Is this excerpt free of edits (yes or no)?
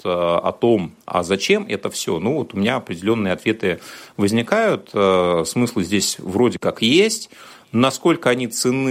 yes